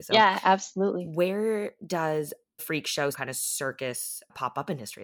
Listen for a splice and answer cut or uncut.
cut